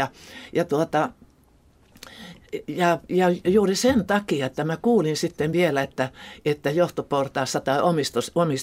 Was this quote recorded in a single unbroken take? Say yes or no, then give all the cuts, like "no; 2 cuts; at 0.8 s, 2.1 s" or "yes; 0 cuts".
yes; 0 cuts